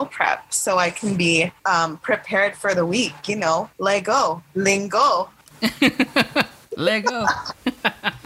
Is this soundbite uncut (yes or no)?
yes